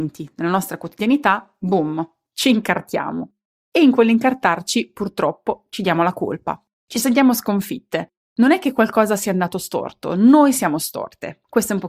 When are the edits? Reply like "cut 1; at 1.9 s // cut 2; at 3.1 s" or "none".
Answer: none